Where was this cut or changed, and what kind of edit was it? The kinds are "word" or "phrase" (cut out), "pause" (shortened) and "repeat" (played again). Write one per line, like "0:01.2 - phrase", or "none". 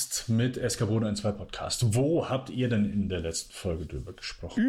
none